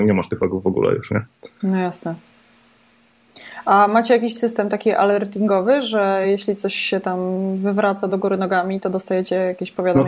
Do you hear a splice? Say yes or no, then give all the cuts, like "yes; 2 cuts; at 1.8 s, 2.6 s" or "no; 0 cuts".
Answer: no; 0 cuts